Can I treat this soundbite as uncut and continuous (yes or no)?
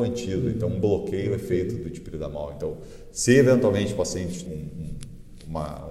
no